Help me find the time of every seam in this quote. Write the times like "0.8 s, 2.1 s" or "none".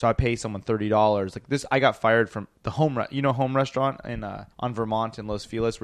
2.5 s, 4.5 s

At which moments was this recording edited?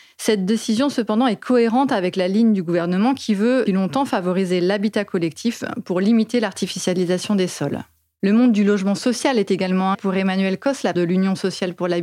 3.7 s, 9.9 s, 10.9 s

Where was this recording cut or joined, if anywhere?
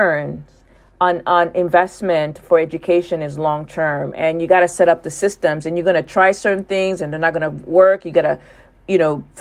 none

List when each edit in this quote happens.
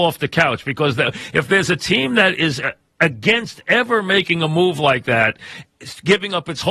none

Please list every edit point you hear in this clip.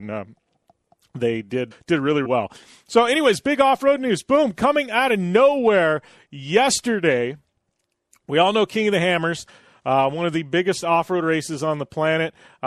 1.7 s, 2.2 s

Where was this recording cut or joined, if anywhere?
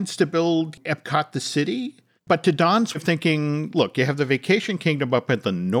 2.2 s, 2.9 s

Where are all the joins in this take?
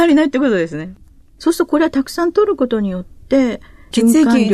none

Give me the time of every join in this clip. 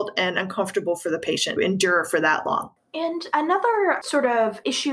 1.6 s

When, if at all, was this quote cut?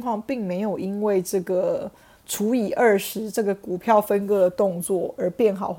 none

